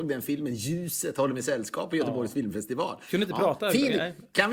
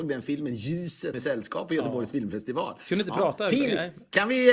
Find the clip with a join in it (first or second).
second